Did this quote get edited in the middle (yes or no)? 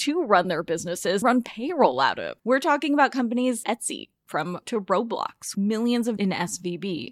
yes